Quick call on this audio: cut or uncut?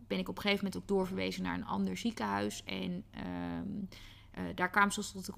uncut